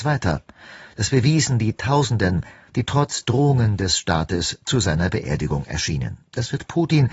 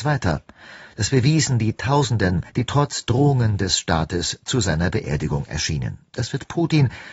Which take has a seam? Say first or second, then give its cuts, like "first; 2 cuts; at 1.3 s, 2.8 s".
second; 1 cut; at 2.5 s